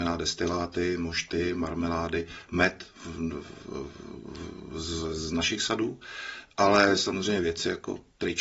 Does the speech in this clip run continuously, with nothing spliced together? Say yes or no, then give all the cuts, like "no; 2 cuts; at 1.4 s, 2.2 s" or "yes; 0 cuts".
yes; 0 cuts